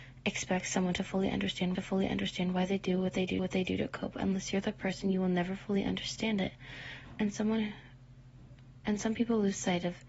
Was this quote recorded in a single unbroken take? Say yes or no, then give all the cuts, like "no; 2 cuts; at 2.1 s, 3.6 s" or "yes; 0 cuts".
no; 2 cuts; at 1.7 s, 3.4 s